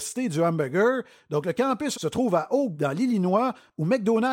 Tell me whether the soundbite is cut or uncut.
cut